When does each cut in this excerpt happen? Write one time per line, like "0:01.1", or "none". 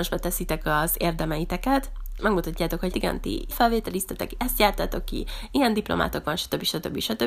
0:02.2
0:02.9
0:03.5